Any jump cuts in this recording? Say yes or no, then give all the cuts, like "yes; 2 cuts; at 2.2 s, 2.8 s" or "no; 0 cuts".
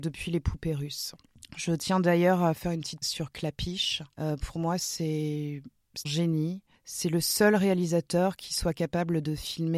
yes; 2 cuts; at 3.0 s, 6.0 s